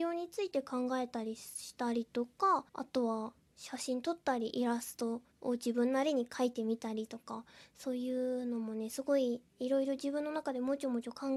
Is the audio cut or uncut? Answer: cut